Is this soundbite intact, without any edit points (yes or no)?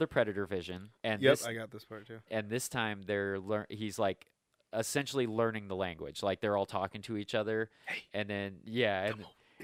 no